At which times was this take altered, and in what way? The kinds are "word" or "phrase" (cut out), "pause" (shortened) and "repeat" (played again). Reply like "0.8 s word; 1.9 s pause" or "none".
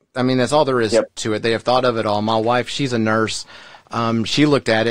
none